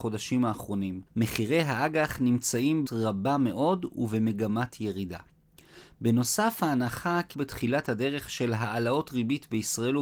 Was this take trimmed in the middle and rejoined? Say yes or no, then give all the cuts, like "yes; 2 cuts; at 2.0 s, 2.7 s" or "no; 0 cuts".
yes; 3 cuts; at 1.1 s, 2.9 s, 7.3 s